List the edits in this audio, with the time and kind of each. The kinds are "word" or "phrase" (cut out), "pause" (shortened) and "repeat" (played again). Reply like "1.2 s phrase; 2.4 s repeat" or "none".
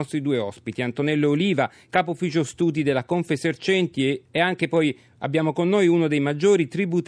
4.3 s pause